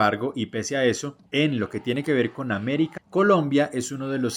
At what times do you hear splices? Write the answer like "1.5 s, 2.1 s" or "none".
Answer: 1.3 s, 3.0 s

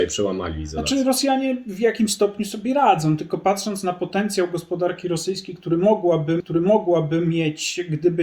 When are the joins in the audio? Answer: 6.4 s

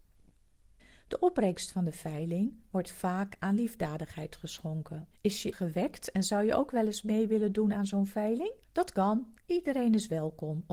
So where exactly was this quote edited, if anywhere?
5.1 s, 5.5 s, 8.6 s, 9.4 s

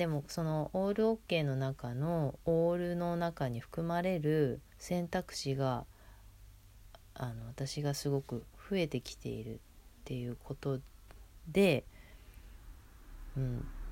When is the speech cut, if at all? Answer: 4.7 s

